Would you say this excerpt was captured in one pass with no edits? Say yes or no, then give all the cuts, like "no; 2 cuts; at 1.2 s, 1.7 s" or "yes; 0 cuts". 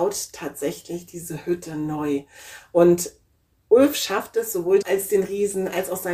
no; 1 cut; at 4.8 s